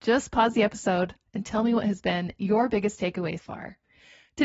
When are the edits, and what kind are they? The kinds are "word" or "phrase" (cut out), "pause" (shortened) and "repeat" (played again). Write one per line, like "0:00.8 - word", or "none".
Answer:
0:03.4 - word